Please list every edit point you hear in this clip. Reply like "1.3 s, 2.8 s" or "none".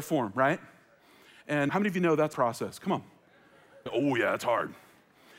1.7 s, 2.3 s, 3.9 s